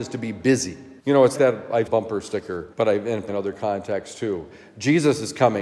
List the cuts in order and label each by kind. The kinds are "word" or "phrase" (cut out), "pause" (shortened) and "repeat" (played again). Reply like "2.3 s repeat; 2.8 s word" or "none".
1.0 s pause; 1.3 s word; 1.9 s phrase; 2.7 s pause; 3.3 s word